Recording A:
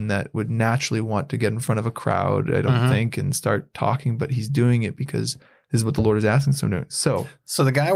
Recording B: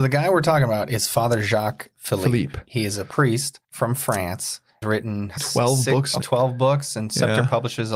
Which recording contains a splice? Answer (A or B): B